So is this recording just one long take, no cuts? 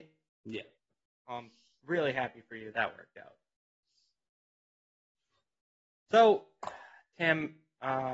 no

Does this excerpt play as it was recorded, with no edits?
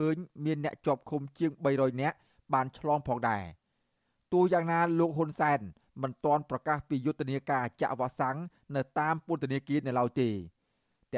yes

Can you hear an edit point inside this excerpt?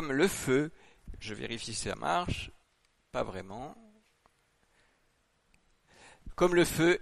yes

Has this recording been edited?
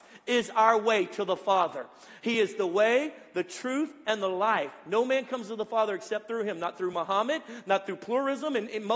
no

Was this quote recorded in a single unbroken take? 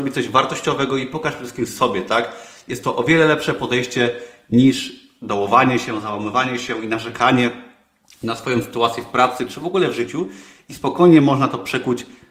yes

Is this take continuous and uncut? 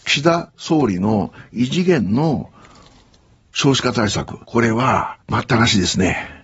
no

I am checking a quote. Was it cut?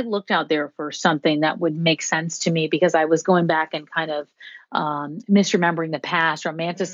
no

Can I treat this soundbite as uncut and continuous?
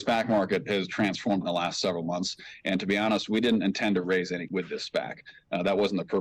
no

